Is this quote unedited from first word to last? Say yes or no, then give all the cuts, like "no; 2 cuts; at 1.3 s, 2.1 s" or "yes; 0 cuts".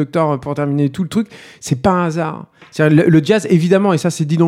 yes; 0 cuts